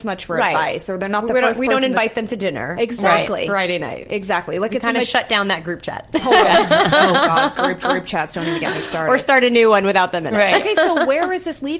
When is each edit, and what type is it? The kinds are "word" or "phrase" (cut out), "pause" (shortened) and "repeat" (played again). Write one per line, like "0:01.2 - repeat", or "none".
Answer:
0:07.8 - repeat